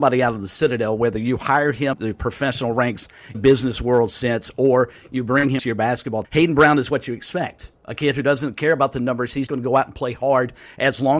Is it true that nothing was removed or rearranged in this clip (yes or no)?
no